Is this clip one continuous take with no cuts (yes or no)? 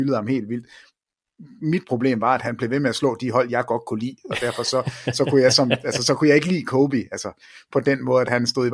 yes